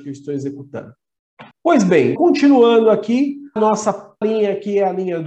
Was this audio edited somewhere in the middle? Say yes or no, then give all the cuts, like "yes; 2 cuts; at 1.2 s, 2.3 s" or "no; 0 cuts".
yes; 4 cuts; at 1.5 s, 2.2 s, 3.6 s, 4.2 s